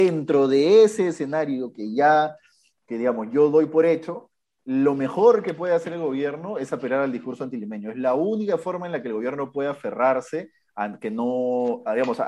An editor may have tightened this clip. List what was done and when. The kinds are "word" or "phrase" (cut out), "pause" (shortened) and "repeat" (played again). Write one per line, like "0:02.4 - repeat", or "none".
none